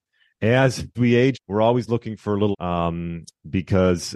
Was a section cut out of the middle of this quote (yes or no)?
yes